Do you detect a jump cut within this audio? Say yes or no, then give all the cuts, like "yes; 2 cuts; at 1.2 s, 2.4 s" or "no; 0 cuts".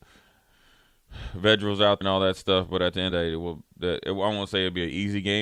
yes; 2 cuts; at 2.0 s, 3.1 s